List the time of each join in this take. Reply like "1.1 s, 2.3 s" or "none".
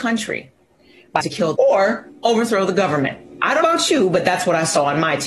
1.2 s, 1.6 s, 3.6 s

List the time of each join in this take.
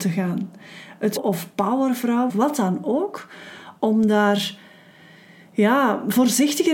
1.2 s, 2.3 s

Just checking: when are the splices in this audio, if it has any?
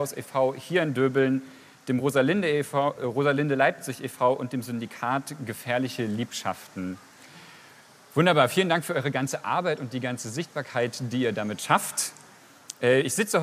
none

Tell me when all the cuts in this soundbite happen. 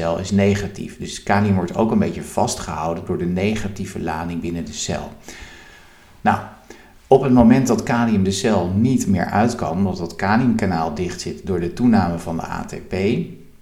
none

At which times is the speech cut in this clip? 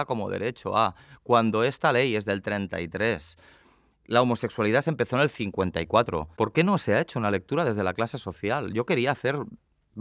6.3 s

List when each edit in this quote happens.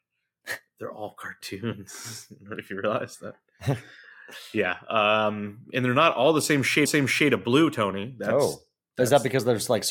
6.9 s

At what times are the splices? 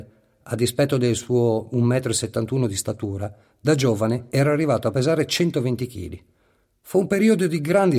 none

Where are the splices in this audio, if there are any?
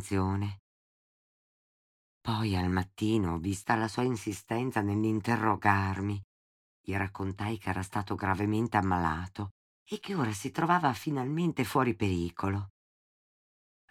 none

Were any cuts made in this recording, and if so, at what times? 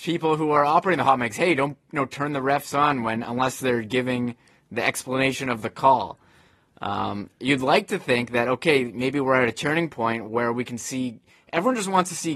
none

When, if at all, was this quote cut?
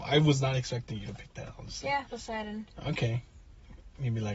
2.1 s

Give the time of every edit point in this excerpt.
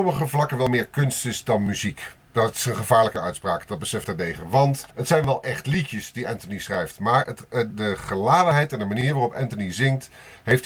2.2 s, 4.0 s, 4.9 s, 7.7 s

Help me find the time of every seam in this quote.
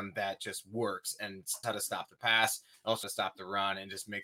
1.6 s, 3.0 s

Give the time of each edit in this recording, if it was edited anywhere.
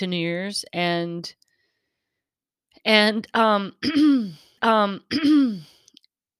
4.6 s

